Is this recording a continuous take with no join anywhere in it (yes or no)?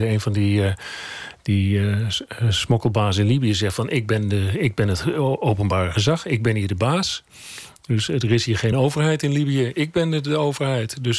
yes